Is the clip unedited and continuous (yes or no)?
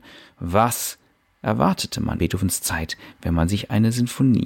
no